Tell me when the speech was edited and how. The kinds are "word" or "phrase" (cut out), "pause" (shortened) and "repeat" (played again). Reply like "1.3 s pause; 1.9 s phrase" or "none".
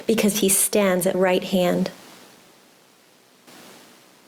1.1 s word